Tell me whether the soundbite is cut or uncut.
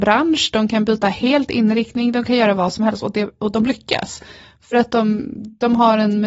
uncut